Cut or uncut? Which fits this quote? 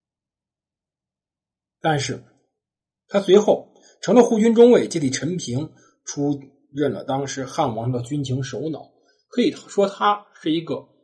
uncut